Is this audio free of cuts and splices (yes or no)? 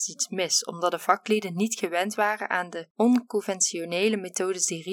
yes